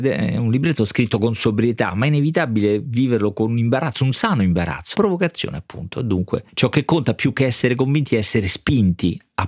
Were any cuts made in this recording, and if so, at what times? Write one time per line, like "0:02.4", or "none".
0:04.9
0:06.5

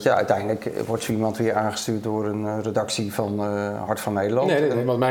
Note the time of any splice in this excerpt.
none

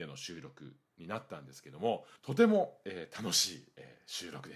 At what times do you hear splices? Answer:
0:02.2

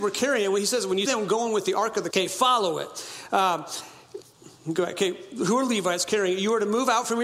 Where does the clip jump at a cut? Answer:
0:01.0
0:02.1
0:04.6

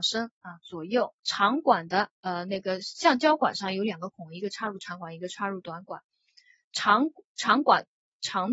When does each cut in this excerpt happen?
0:01.2
0:02.1

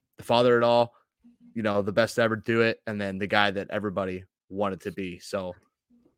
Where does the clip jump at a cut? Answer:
none

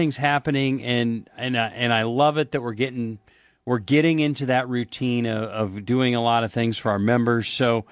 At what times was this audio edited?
none

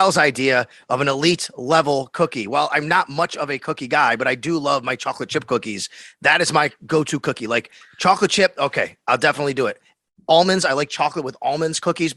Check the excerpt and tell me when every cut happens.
none

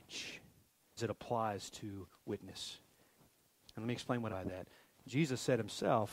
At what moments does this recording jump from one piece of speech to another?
0:01.0
0:04.3

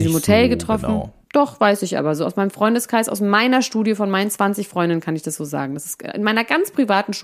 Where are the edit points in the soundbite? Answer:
0:01.2

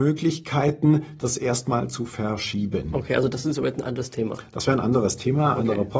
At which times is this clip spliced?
none

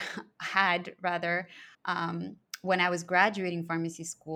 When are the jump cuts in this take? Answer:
0:01.7

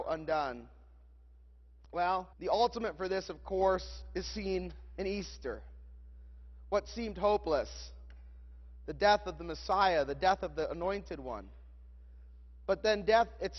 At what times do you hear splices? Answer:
0:02.3

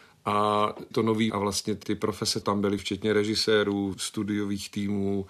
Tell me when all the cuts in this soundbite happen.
0:00.9
0:01.3
0:01.8
0:02.4
0:02.8
0:03.9

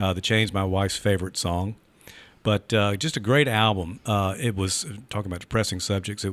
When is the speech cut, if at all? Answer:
none

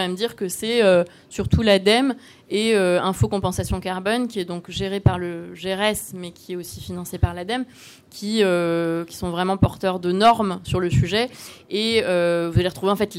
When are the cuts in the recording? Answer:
none

